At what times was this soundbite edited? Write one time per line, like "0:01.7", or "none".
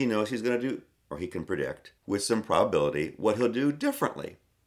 0:02.0